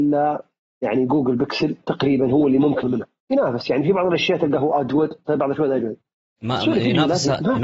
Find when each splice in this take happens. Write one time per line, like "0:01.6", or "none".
0:02.8
0:03.2